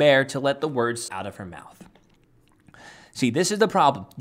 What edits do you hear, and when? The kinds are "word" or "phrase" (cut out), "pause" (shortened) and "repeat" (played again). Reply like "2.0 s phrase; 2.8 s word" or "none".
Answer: 1.1 s word